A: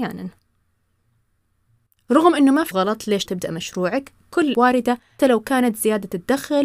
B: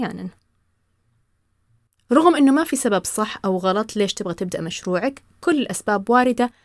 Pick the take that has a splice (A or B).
A